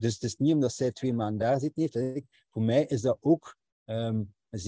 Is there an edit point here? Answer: no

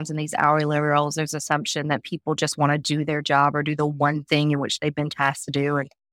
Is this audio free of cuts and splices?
yes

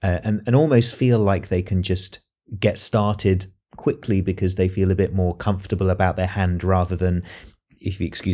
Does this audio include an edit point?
no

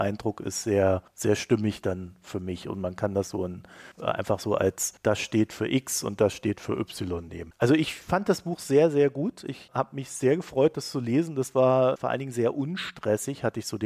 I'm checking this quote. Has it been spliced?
yes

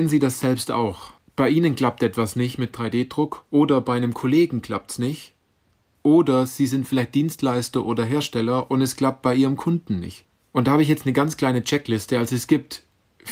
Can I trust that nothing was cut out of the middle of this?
yes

